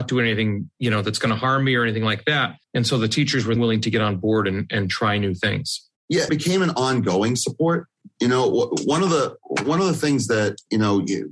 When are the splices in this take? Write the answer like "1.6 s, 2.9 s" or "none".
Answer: 2.6 s, 3.6 s, 6.3 s